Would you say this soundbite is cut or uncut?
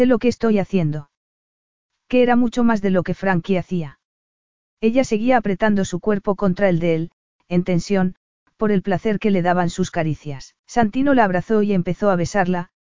cut